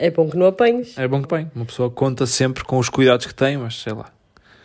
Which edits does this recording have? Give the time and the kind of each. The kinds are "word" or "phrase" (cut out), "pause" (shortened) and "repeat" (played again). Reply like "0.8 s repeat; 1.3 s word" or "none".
1.2 s word